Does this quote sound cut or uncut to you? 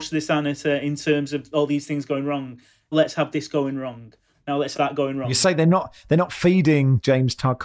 cut